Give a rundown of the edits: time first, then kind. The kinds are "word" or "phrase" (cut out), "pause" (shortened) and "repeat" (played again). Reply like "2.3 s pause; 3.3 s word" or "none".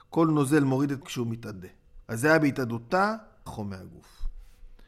1.0 s word; 2.0 s pause; 3.5 s word